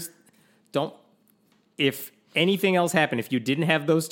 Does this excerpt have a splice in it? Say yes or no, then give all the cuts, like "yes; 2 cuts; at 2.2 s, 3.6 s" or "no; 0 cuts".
no; 0 cuts